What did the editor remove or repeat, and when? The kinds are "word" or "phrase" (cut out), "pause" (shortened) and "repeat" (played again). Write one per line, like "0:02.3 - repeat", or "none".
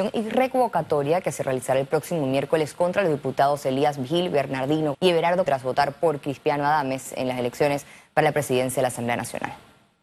0:04.9 - word
0:05.5 - word